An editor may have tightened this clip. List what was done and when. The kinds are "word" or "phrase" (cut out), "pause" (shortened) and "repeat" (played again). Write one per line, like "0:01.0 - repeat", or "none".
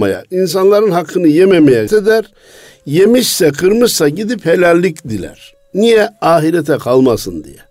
0:01.9 - word

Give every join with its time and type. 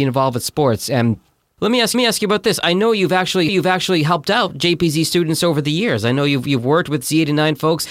0:01.9 - repeat
0:03.5 - repeat

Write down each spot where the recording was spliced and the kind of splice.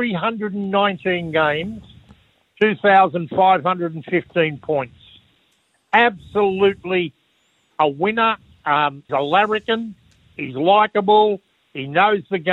0:09.1 - word

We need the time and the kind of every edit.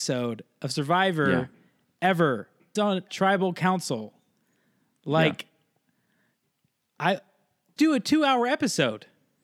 0:02.8 - word
0:03.1 - word
0:07.8 - word

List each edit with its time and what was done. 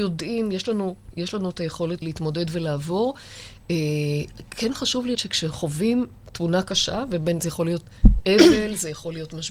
0:02.0 - word
0:05.1 - word
0:08.2 - word

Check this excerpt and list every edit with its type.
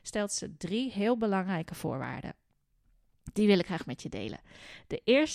none

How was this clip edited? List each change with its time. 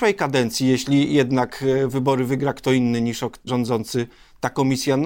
0:03.5 - word

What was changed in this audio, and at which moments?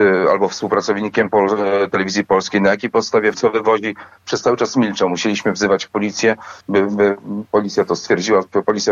0:03.3 - word
0:06.6 - pause

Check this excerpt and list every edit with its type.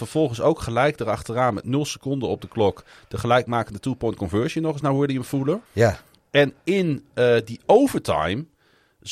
0:05.7 - pause

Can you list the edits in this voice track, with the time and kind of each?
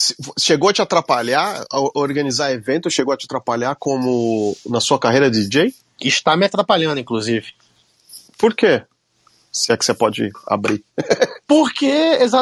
0:08.3 - pause

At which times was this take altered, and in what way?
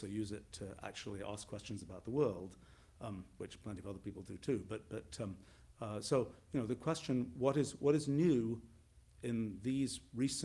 none

